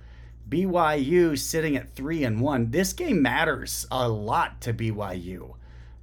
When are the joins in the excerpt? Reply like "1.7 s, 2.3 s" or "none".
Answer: none